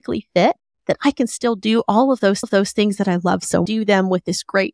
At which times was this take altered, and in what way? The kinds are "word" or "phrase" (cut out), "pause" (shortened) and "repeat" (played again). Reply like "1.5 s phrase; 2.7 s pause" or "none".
2.4 s repeat; 3.7 s phrase